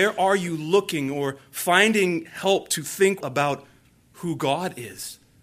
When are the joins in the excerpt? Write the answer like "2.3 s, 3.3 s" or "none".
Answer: 3.2 s